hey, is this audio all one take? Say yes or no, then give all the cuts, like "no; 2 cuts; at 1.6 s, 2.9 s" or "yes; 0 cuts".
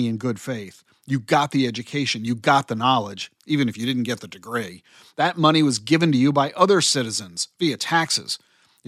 yes; 0 cuts